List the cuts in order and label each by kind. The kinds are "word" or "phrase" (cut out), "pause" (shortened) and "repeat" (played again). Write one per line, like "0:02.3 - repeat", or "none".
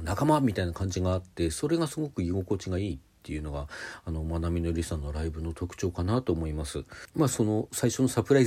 0:07.1 - pause